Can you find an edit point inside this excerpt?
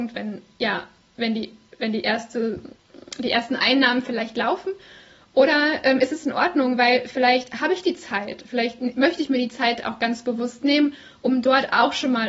no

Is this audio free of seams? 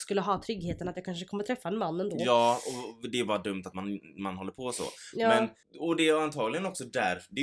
no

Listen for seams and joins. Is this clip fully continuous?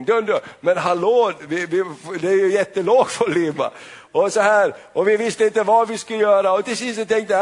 yes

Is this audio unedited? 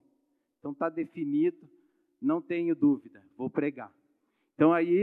yes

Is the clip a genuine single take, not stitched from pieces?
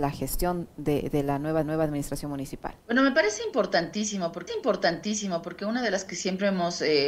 no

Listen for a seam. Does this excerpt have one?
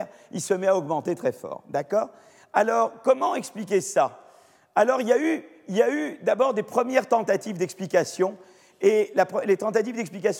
no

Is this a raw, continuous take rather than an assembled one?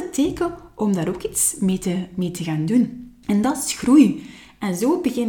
yes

